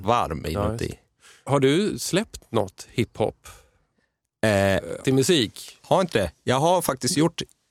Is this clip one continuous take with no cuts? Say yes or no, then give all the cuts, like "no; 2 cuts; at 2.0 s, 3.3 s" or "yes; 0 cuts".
no; 3 cuts; at 1.5 s, 5.0 s, 6.1 s